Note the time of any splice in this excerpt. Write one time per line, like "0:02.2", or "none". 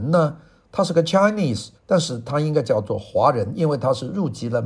0:01.8